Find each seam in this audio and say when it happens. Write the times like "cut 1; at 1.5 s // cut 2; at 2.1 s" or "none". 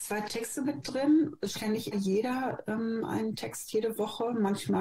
cut 1; at 1.5 s // cut 2; at 1.9 s